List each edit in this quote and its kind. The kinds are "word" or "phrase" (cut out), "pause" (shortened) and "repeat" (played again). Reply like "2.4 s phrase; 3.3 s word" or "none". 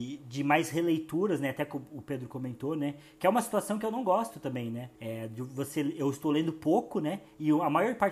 5.0 s pause